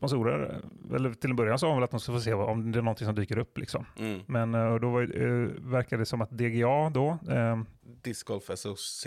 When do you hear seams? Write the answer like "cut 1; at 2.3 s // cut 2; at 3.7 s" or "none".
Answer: cut 1; at 2.0 s

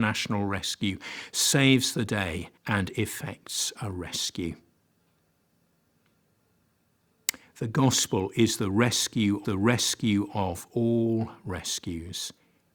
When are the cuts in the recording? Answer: cut 1; at 2.6 s // cut 2; at 9.4 s

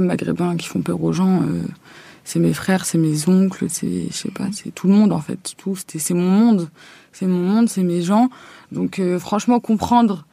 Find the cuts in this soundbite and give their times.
none

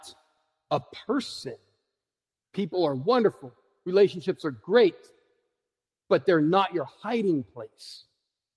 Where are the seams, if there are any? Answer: none

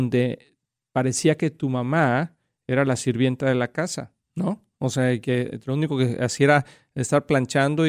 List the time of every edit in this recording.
cut 1; at 4.2 s

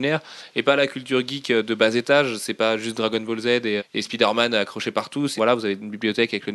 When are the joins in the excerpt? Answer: cut 1; at 3.8 s // cut 2; at 5.4 s

